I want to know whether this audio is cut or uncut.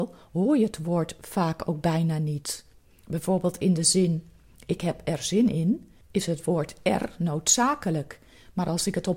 uncut